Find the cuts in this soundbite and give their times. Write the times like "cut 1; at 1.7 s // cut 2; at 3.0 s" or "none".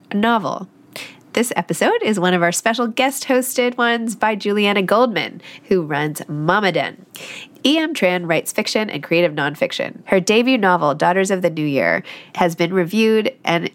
none

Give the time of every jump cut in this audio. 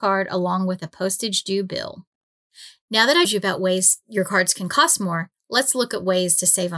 cut 1; at 3.2 s

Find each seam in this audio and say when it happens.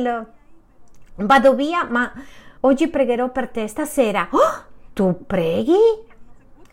cut 1; at 2.6 s

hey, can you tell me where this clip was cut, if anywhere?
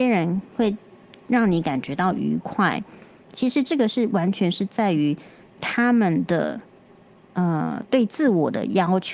none

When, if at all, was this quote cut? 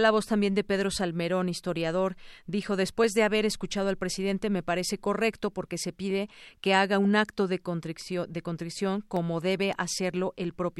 none

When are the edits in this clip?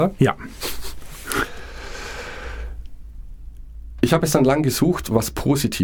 none

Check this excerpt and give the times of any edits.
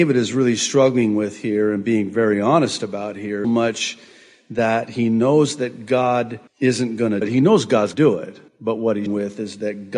cut 1; at 3.4 s // cut 2; at 6.5 s // cut 3; at 7.2 s // cut 4; at 7.9 s // cut 5; at 8.5 s // cut 6; at 9.1 s

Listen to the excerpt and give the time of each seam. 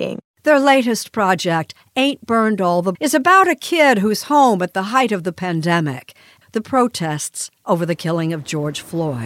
cut 1; at 2.9 s // cut 2; at 6.4 s

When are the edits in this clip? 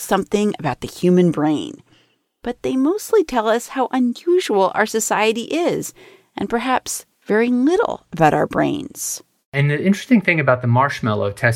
none

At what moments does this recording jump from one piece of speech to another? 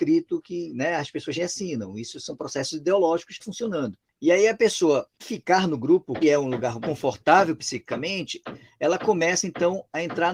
cut 1; at 1.4 s // cut 2; at 3.4 s // cut 3; at 5.2 s // cut 4; at 6.2 s // cut 5; at 6.8 s

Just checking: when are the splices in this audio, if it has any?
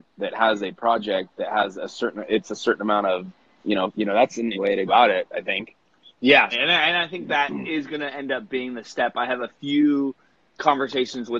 cut 1; at 3.9 s // cut 2; at 4.5 s // cut 3; at 4.9 s // cut 4; at 6.5 s

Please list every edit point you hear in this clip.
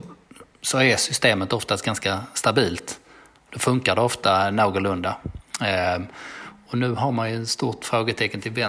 none

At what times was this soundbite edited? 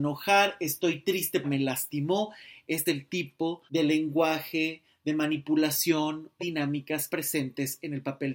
cut 1; at 1.4 s // cut 2; at 2.9 s // cut 3; at 3.7 s // cut 4; at 6.4 s // cut 5; at 7.1 s

